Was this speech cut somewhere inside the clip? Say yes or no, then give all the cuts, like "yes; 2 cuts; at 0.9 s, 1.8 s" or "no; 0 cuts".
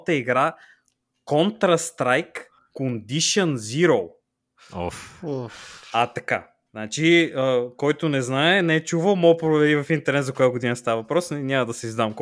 no; 0 cuts